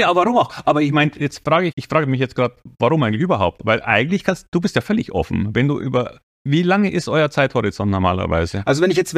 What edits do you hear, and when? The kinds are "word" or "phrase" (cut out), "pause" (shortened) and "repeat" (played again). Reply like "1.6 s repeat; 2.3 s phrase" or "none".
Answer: 1.7 s word

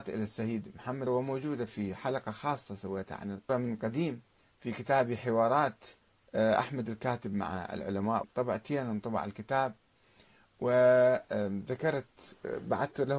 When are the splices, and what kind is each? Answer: 1.1 s word; 3.5 s phrase; 4.4 s pause; 6.0 s pause; 8.2 s word

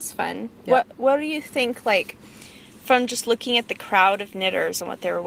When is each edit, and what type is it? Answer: none

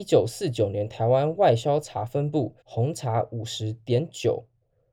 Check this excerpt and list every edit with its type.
2.6 s pause

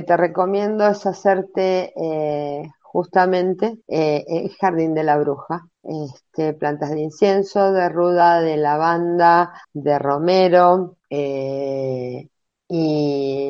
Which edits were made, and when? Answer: 3.8 s pause; 5.7 s pause; 9.6 s pause; 11.0 s pause

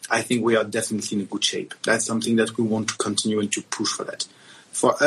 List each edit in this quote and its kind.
1.8 s pause

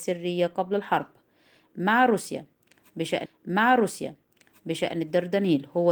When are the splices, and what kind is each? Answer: 3.2 s repeat

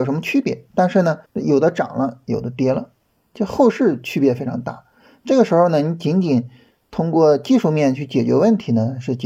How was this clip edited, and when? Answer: 1.2 s pause; 3.3 s word

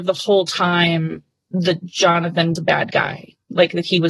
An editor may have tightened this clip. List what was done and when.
2.6 s word

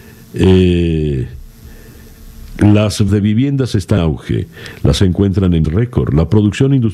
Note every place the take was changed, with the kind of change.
3.1 s word; 4.0 s word; 5.0 s word; 5.6 s word

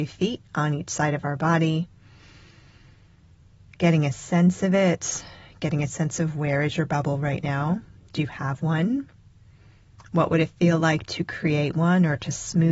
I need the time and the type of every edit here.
none

